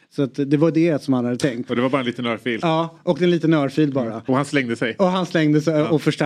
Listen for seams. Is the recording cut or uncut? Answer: uncut